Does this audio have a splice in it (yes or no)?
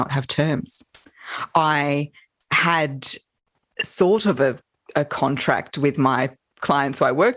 no